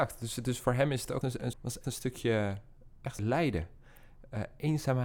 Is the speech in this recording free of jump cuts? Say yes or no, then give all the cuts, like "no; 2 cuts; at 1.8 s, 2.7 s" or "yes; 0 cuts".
no; 4 cuts; at 1.2 s, 1.5 s, 1.8 s, 3.2 s